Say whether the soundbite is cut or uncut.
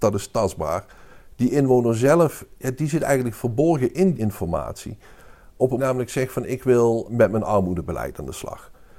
cut